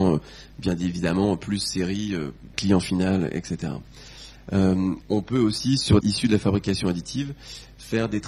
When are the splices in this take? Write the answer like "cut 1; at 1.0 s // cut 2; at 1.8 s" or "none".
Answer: cut 1; at 2.5 s // cut 2; at 5.0 s // cut 3; at 6.0 s